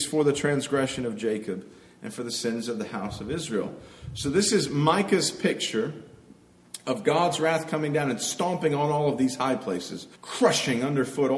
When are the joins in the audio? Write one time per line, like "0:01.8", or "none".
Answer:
0:10.2